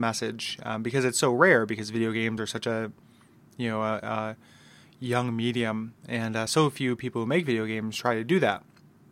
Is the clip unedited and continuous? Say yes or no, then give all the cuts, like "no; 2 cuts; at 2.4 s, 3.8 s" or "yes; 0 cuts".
yes; 0 cuts